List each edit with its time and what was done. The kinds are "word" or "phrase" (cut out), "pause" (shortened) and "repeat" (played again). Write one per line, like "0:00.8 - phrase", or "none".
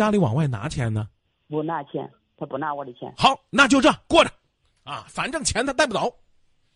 none